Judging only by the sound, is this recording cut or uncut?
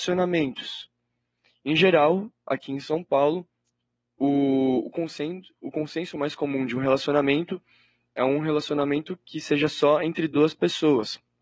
uncut